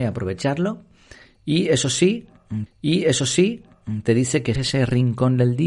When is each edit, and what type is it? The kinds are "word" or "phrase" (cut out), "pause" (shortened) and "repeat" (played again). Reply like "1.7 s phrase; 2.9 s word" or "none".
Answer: 2.7 s repeat; 4.6 s phrase